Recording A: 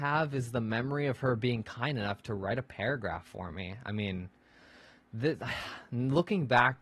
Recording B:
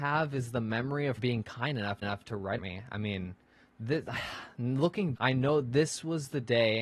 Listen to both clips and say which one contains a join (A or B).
B